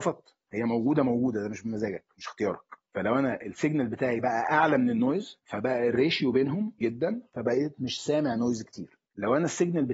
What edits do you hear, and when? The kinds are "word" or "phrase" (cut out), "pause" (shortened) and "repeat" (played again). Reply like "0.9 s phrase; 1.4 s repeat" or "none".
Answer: 6.8 s word